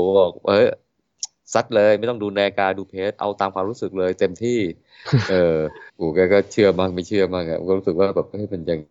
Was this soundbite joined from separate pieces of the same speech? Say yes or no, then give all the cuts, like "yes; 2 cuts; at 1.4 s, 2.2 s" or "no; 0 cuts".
yes; 1 cut; at 5.9 s